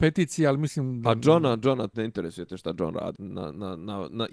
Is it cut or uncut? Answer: cut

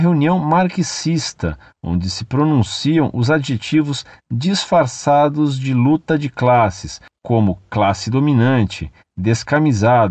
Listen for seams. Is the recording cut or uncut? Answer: uncut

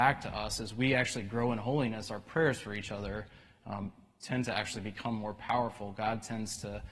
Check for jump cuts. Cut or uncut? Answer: uncut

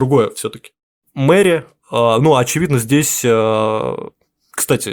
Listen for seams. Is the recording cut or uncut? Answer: uncut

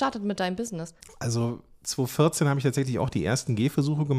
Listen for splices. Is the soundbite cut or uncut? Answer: cut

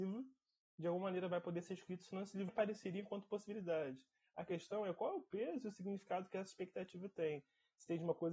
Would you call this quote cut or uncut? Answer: cut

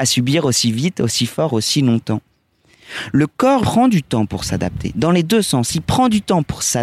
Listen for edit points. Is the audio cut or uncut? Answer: cut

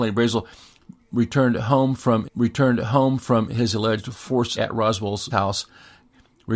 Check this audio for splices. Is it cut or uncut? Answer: cut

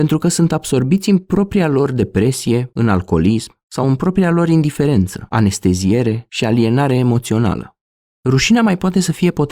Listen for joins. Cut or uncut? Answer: uncut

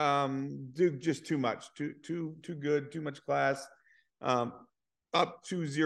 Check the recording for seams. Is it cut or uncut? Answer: uncut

